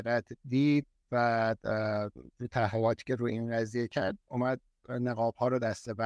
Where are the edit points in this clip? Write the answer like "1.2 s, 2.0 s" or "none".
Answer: none